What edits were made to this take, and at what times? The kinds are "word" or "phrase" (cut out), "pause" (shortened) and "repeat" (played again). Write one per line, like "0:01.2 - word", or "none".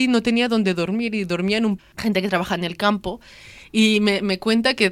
0:01.8 - word